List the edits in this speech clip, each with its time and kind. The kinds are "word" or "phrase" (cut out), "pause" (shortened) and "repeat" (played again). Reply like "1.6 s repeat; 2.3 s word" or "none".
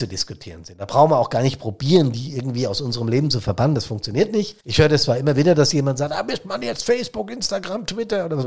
4.6 s pause